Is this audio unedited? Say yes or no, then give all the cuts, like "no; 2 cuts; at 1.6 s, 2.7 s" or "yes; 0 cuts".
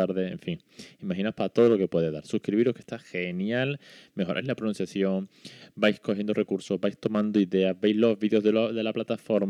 yes; 0 cuts